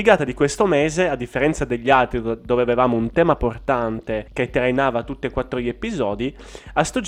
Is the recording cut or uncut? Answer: cut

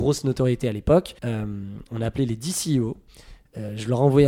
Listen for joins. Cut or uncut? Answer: cut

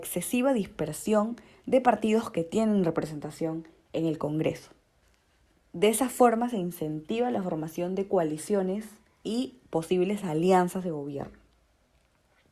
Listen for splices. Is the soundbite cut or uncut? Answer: uncut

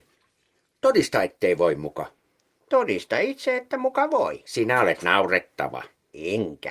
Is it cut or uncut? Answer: uncut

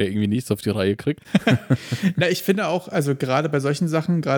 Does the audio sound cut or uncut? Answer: uncut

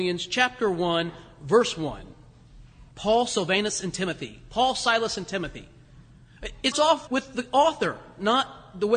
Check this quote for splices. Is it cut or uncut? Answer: cut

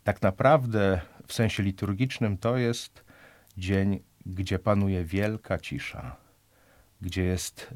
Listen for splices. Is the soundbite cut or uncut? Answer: uncut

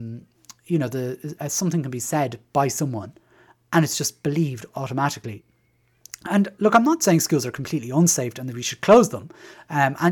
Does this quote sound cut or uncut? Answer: uncut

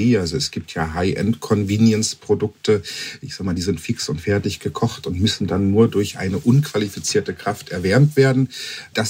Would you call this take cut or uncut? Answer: uncut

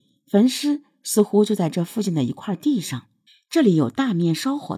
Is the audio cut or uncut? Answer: cut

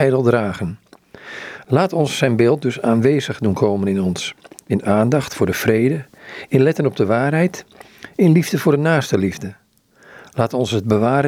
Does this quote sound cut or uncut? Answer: uncut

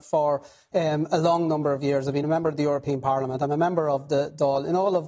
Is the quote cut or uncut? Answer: uncut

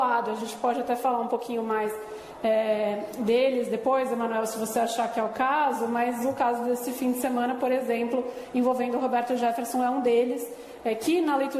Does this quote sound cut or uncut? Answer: uncut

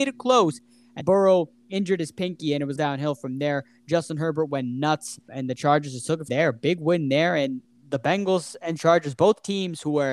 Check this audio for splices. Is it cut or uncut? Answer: cut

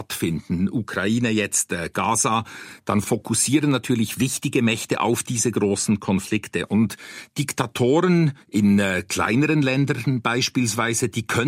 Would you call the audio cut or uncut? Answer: cut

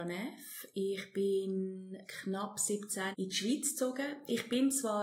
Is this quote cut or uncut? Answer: cut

